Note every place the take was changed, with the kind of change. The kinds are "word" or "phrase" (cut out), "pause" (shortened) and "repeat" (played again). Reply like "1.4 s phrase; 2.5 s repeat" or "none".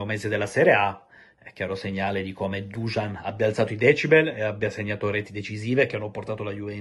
none